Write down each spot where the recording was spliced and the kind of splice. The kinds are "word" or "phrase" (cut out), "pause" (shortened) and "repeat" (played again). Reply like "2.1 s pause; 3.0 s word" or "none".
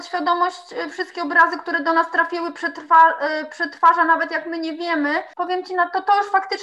0.9 s word; 5.3 s pause